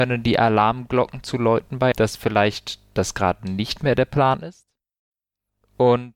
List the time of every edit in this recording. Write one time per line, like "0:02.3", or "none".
0:01.9